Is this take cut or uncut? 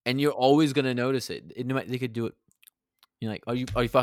uncut